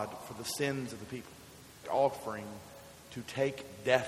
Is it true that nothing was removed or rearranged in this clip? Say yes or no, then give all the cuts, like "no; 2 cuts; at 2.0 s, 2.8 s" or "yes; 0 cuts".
no; 1 cut; at 1.8 s